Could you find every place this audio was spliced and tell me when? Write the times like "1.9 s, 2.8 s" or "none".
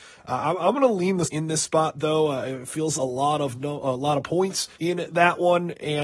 1.2 s, 3.0 s, 4.7 s